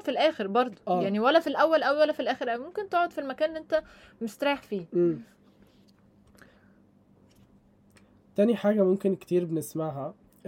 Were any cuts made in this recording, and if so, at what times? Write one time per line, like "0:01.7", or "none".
none